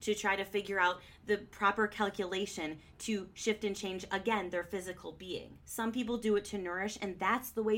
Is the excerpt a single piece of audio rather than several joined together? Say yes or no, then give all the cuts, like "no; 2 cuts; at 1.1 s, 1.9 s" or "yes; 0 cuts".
no; 1 cut; at 5.6 s